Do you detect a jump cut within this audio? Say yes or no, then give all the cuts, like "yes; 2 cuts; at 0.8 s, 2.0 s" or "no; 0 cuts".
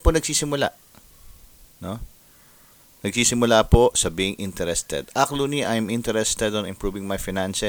no; 0 cuts